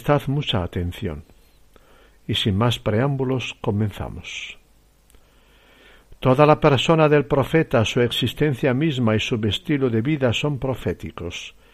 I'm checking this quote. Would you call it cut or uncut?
uncut